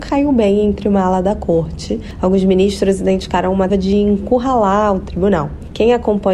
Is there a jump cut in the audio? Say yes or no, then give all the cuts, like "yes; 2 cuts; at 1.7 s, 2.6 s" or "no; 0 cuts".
yes; 1 cut; at 3.7 s